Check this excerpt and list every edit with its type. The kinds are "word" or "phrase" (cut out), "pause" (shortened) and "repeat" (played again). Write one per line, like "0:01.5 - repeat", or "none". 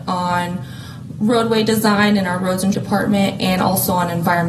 0:02.7 - word